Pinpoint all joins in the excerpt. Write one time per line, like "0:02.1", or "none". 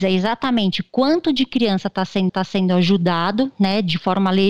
0:02.3